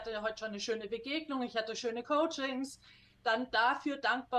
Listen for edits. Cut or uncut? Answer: uncut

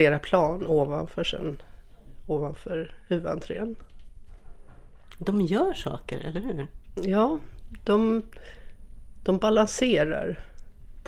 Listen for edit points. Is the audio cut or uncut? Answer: uncut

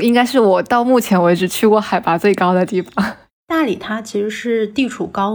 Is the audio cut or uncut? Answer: uncut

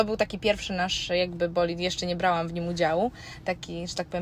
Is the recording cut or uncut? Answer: uncut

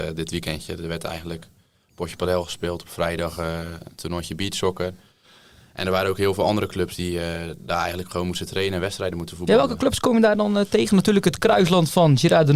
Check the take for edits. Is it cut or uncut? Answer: uncut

